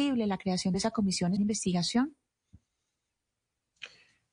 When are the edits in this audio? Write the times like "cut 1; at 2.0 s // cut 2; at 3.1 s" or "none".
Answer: cut 1; at 1.4 s